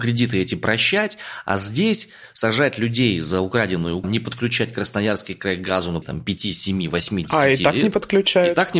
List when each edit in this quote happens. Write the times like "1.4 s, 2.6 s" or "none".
4.0 s, 6.0 s